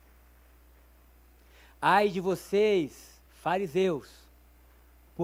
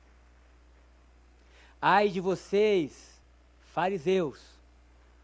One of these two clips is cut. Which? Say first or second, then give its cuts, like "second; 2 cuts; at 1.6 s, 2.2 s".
first; 1 cut; at 3.2 s